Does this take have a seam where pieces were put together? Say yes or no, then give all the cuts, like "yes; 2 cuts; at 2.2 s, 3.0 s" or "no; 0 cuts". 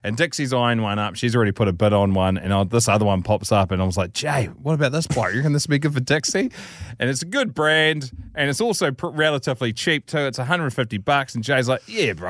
no; 0 cuts